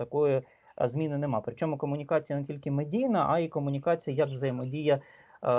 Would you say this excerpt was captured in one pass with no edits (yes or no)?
yes